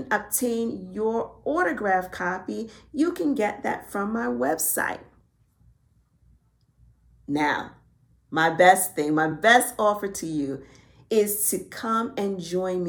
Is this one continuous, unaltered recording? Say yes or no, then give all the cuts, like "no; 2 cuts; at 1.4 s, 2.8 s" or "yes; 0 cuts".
yes; 0 cuts